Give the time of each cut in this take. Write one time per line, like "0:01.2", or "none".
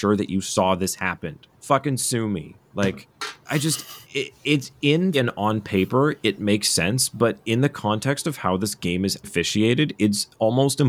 0:01.5
0:03.4
0:04.0
0:05.1
0:09.2